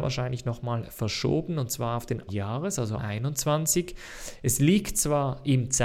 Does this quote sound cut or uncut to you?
cut